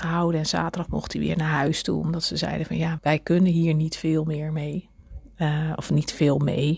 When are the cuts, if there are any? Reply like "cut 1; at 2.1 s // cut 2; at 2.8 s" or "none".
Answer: cut 1; at 3.0 s